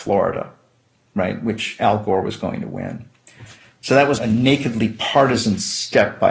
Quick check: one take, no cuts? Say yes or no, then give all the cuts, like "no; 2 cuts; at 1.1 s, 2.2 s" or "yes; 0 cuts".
no; 1 cut; at 4.2 s